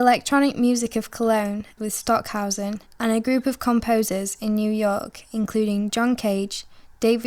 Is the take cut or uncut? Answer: cut